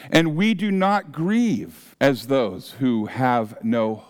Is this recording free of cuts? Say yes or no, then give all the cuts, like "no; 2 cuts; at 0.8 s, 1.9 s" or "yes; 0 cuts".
no; 1 cut; at 1.9 s